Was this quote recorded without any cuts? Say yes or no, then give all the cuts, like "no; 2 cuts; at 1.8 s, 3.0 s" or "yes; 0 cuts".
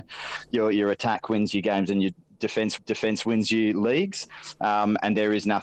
no; 1 cut; at 2.8 s